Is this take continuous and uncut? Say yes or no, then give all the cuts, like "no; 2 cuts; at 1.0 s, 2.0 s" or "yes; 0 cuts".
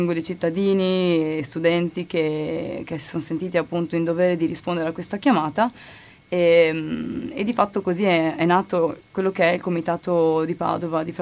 yes; 0 cuts